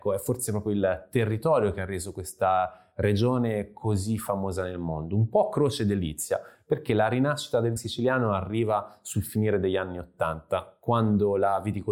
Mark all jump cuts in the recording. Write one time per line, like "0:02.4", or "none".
0:07.8